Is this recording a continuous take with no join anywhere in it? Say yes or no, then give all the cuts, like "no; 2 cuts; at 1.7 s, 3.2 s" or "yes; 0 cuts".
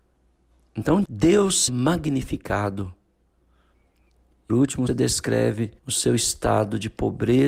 no; 5 cuts; at 1.0 s, 1.7 s, 4.5 s, 4.9 s, 5.8 s